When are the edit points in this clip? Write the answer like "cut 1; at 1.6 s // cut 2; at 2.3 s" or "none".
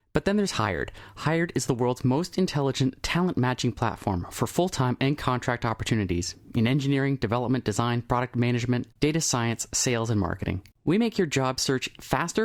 cut 1; at 9.0 s // cut 2; at 10.7 s